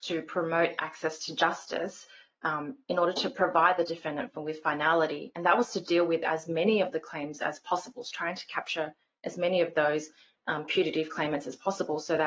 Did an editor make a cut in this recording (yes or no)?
no